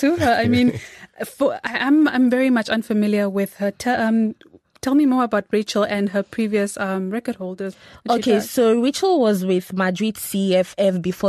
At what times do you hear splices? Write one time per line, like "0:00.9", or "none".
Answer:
none